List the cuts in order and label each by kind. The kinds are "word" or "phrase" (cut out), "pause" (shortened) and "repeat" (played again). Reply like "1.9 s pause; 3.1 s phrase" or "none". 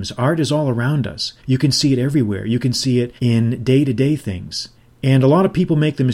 1.4 s pause; 3.2 s pause; 4.7 s pause